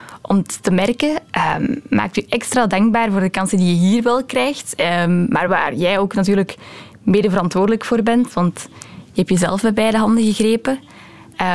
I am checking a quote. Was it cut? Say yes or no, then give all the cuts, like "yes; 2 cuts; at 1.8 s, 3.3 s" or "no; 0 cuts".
no; 0 cuts